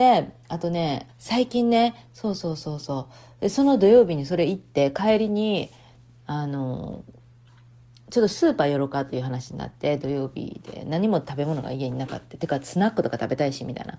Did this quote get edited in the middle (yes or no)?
yes